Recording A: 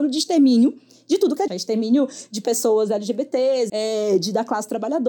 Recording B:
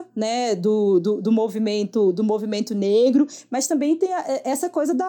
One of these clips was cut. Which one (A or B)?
A